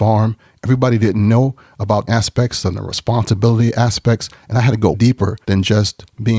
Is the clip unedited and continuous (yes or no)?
no